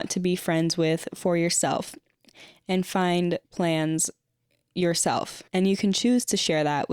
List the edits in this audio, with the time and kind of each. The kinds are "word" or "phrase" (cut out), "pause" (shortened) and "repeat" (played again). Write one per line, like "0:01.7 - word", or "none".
0:03.4 - pause
0:05.5 - pause